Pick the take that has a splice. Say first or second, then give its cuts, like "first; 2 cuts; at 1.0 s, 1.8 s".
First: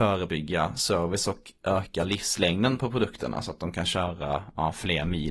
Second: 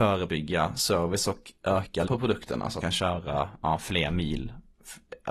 second; 2 cuts; at 2.1 s, 2.8 s